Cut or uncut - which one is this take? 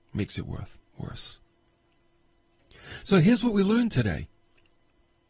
uncut